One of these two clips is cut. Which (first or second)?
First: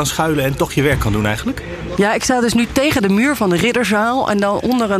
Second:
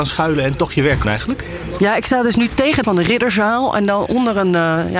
second